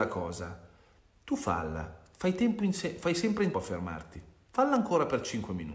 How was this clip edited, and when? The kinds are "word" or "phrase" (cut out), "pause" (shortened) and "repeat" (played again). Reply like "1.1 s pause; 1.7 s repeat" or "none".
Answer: 3.5 s word